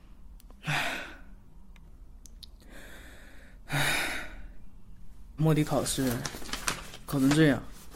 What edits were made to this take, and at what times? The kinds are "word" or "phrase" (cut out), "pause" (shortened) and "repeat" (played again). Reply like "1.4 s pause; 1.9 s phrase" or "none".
5.4 s phrase